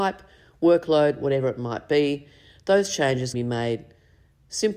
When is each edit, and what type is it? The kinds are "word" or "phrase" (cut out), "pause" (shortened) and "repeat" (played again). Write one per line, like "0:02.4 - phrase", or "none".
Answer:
0:03.3 - word

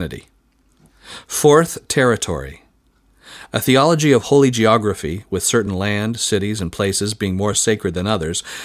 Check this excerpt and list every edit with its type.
none

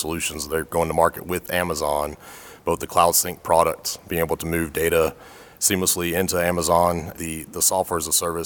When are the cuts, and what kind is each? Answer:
0:01.2 - word
0:07.1 - word

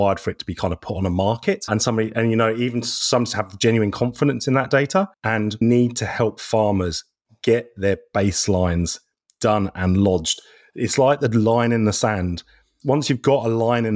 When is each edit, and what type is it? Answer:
none

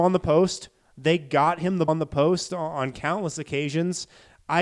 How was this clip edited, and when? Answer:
0:01.9 - word

